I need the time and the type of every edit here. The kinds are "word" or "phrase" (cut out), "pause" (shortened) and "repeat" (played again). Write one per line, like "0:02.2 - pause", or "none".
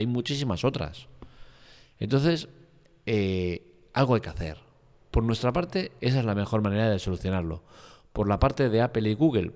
none